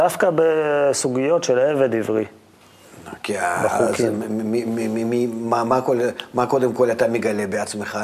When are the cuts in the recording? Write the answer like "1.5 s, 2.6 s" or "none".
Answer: none